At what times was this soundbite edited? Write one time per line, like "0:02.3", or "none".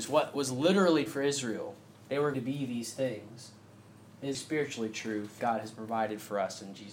0:01.1
0:02.3
0:04.3
0:05.4